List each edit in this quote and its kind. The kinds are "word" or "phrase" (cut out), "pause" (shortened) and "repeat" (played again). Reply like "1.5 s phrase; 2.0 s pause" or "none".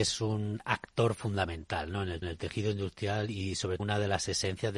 2.2 s repeat; 3.8 s word